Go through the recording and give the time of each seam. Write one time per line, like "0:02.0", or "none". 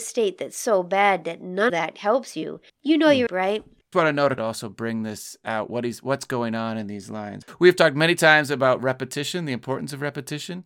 0:01.7
0:02.7
0:03.3
0:03.9
0:04.4